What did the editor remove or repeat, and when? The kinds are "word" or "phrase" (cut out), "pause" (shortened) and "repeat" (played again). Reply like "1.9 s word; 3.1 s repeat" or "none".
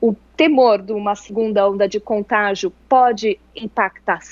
none